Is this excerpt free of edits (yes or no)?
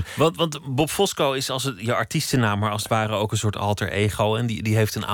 yes